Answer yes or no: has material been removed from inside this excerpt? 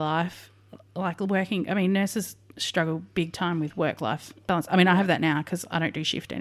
no